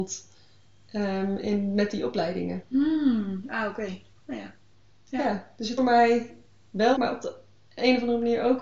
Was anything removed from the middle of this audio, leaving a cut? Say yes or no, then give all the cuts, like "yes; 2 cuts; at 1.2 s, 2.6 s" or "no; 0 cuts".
yes; 4 cuts; at 4.1 s, 4.7 s, 5.8 s, 7.0 s